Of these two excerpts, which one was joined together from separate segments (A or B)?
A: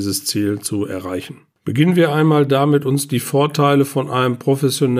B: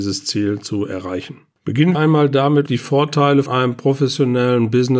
B